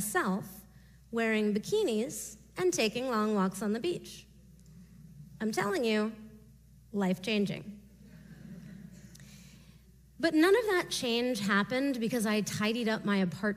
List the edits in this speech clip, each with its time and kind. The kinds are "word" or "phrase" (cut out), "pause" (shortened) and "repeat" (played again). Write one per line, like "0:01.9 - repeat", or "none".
none